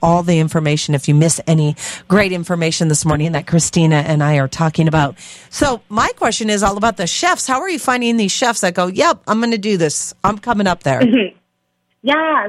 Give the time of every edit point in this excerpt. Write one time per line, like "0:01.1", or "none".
none